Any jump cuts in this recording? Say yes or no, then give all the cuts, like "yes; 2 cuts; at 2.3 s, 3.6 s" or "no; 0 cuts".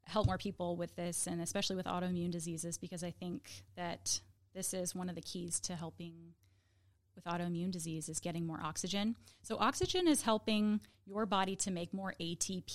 no; 0 cuts